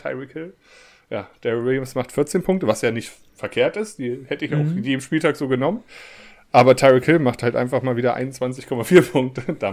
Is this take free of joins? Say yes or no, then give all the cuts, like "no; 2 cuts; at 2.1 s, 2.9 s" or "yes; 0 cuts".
yes; 0 cuts